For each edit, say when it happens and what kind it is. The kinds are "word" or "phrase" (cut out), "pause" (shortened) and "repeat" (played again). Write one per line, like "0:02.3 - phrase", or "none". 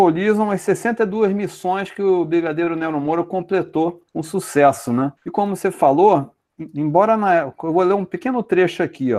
0:04.1 - pause
0:05.2 - pause